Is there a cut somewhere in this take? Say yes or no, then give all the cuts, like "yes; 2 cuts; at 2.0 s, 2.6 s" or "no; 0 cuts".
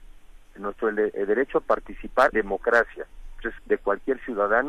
yes; 2 cuts; at 2.3 s, 3.6 s